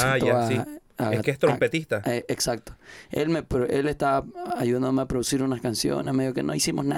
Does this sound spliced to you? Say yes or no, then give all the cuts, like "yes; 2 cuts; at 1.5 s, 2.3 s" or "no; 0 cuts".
no; 0 cuts